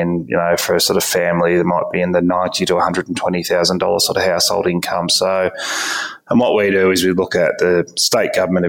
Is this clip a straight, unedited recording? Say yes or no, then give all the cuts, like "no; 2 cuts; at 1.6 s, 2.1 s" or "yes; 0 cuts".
yes; 0 cuts